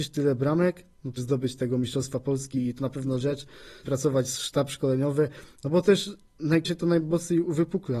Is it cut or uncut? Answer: cut